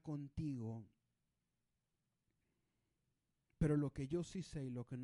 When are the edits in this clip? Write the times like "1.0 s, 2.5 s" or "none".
none